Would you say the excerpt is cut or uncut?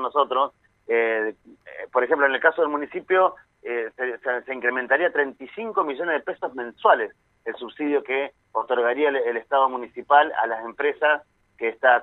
uncut